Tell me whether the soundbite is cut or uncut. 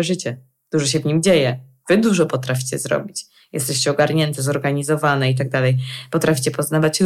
uncut